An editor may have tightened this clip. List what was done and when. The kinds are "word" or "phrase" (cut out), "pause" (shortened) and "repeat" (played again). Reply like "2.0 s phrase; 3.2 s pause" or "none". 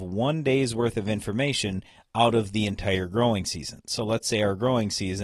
none